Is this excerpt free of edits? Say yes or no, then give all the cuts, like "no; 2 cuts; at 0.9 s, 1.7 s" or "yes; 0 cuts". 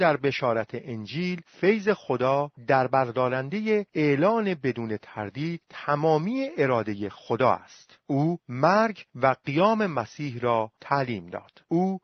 yes; 0 cuts